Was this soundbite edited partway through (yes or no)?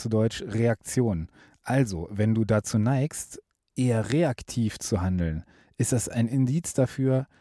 no